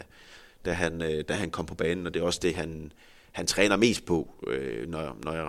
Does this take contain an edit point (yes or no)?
no